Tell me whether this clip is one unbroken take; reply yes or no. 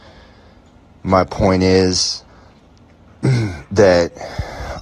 no